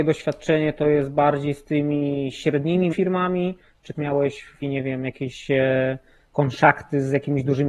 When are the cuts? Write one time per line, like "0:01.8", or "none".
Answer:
0:02.9
0:03.9
0:04.6